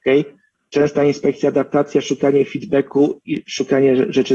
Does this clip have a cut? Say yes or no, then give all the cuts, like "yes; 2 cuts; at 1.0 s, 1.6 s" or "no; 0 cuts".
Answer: no; 0 cuts